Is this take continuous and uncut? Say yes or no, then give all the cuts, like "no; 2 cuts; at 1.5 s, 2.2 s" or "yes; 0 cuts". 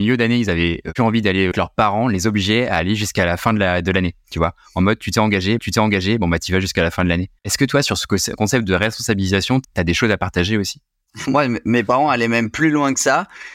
no; 5 cuts; at 1.5 s, 5.6 s, 7.4 s, 9.6 s, 11.3 s